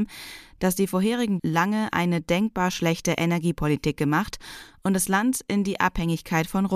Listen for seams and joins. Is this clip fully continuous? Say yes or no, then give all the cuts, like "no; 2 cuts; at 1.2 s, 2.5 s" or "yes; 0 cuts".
no; 1 cut; at 1.4 s